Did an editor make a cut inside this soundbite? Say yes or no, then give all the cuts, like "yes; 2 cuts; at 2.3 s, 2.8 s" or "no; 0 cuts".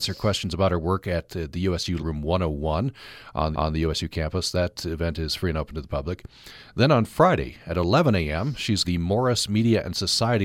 yes; 3 cuts; at 2.0 s, 3.5 s, 8.8 s